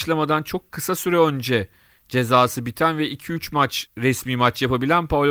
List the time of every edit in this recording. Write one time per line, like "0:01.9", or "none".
none